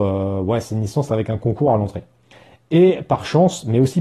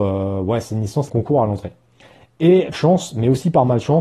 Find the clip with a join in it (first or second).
second